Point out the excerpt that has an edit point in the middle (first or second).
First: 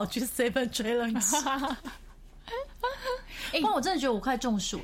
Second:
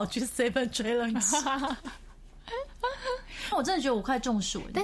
second